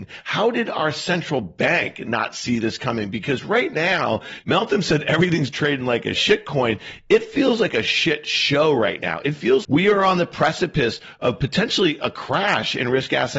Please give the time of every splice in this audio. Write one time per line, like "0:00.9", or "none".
0:09.6